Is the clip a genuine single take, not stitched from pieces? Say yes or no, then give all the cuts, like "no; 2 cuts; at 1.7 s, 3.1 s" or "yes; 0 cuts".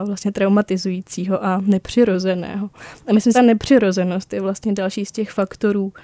no; 1 cut; at 3.3 s